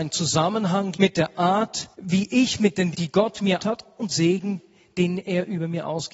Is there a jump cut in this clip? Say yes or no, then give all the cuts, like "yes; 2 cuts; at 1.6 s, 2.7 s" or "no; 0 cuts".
yes; 5 cuts; at 0.9 s, 1.9 s, 2.9 s, 3.6 s, 4.1 s